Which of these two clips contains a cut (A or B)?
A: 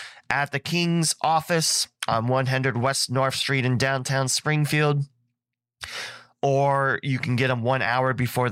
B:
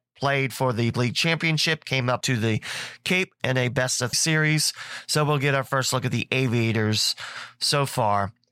B